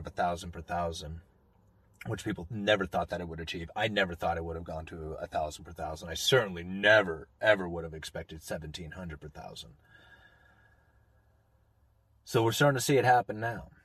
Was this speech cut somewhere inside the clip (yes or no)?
no